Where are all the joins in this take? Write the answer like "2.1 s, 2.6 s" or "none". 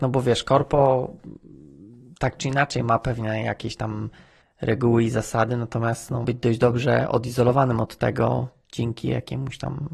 6.2 s